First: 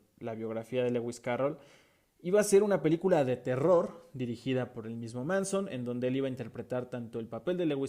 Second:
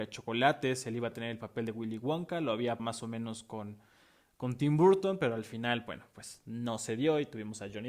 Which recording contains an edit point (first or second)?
second